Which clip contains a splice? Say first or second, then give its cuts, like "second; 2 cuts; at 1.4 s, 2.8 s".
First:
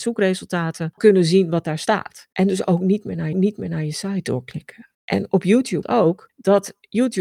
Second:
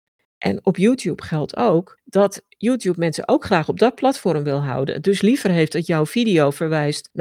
first; 5 cuts; at 1.0 s, 2.3 s, 3.3 s, 4.9 s, 5.8 s